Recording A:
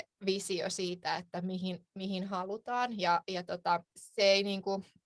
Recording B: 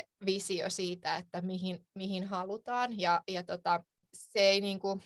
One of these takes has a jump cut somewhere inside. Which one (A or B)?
A